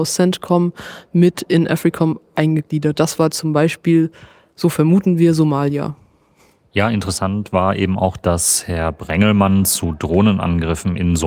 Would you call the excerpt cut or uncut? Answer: uncut